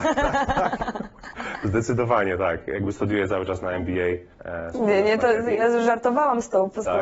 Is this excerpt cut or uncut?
cut